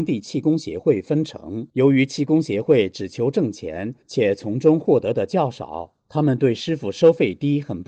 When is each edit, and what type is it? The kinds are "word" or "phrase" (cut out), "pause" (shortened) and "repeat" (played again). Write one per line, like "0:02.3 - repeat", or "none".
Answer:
0:01.7 - pause
0:04.0 - pause
0:06.0 - pause